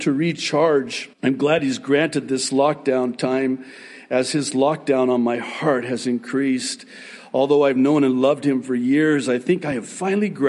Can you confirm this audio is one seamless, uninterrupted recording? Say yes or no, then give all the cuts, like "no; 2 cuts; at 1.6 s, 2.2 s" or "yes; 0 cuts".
no; 1 cut; at 1.1 s